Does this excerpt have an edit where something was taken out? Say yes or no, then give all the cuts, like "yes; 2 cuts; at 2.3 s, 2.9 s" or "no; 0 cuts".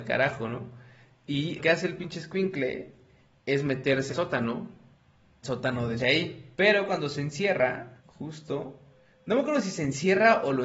yes; 6 cuts; at 1.6 s, 4.1 s, 5.4 s, 6.0 s, 6.5 s, 8.0 s